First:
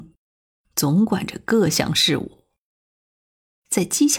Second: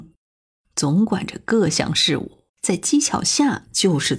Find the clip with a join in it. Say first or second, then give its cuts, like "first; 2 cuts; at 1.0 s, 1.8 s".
second; 1 cut; at 2.5 s